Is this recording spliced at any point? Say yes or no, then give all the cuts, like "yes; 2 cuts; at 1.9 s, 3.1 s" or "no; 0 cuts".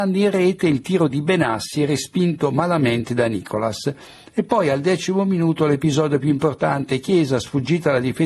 no; 0 cuts